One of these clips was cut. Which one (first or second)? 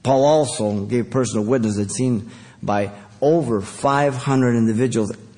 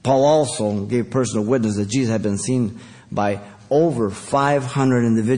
first